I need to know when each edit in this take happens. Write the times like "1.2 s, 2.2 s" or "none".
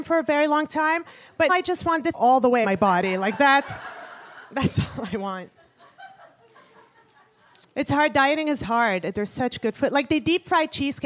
1.5 s, 2.1 s, 2.6 s, 4.5 s, 7.7 s